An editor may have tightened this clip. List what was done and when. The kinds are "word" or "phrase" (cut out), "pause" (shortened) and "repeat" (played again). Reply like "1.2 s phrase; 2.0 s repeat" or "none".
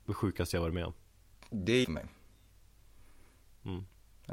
1.8 s word